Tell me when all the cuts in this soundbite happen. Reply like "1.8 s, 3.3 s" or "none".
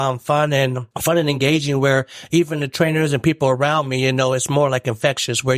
0.9 s